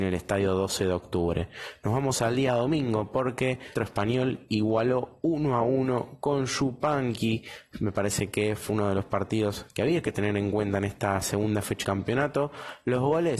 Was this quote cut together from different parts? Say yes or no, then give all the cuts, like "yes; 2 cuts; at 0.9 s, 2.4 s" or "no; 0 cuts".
yes; 2 cuts; at 3.8 s, 11.8 s